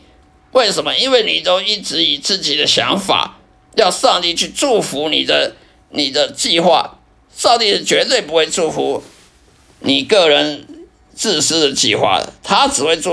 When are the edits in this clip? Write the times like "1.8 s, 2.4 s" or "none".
none